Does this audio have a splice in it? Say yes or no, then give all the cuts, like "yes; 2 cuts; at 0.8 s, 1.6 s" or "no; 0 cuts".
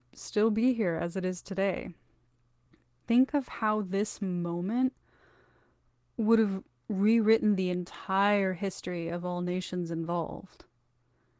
no; 0 cuts